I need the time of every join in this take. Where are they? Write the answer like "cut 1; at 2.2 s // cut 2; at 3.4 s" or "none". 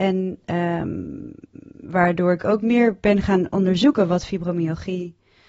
none